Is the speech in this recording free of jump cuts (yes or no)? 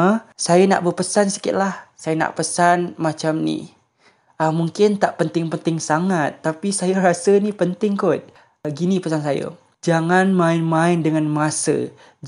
yes